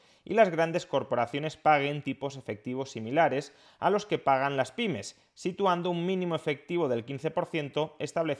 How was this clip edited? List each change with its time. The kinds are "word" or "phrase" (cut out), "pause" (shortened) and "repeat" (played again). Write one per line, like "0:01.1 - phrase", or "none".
none